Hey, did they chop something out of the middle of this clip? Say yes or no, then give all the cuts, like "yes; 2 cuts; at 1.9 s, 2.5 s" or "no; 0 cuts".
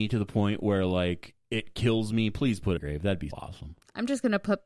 yes; 2 cuts; at 2.8 s, 3.3 s